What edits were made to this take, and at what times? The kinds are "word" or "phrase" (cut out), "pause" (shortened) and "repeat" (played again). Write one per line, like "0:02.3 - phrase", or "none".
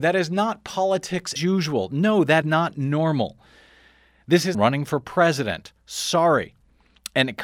0:01.4 - word
0:02.4 - word
0:04.5 - phrase